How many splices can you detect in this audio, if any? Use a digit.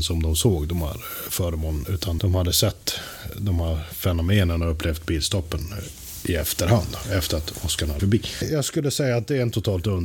2